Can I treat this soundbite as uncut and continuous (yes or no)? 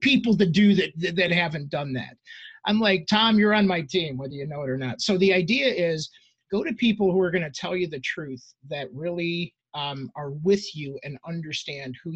yes